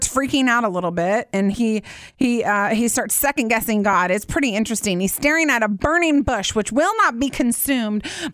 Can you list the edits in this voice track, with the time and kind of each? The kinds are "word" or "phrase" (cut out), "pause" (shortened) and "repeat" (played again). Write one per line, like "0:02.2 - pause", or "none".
none